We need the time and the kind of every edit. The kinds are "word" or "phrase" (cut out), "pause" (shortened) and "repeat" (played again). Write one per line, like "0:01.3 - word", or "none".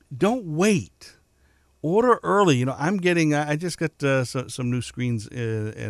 none